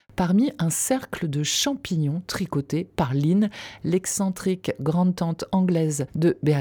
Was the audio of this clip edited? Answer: no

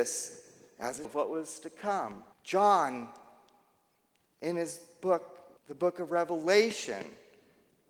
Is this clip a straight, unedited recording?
no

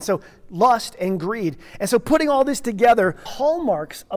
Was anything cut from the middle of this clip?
yes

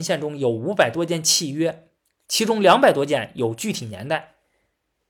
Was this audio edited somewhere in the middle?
no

